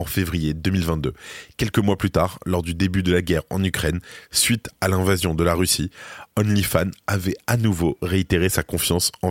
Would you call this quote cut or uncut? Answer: uncut